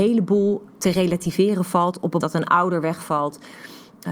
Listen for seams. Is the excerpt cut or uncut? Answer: cut